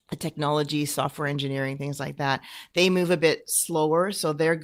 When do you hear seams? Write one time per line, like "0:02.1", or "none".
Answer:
none